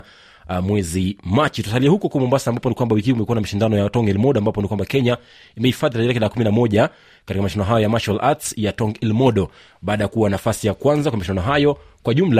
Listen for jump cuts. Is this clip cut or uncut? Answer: uncut